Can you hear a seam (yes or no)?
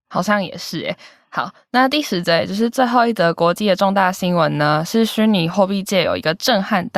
no